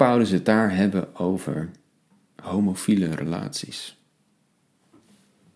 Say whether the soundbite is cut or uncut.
uncut